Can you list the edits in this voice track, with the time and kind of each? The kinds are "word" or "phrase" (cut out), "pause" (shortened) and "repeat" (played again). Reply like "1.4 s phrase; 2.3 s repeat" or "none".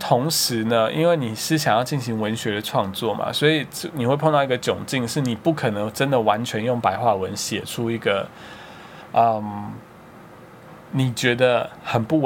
10.8 s pause